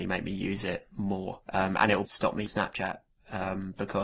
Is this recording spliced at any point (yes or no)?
yes